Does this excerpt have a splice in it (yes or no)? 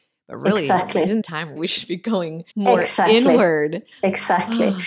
yes